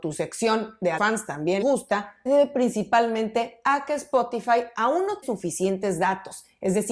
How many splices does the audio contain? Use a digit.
4